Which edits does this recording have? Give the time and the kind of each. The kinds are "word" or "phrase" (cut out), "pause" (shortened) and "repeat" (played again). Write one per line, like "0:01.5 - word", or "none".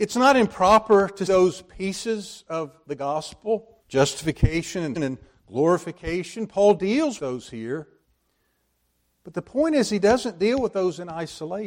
0:01.3 - word
0:03.8 - pause
0:05.0 - word
0:07.2 - word